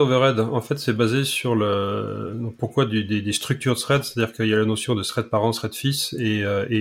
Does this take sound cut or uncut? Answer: uncut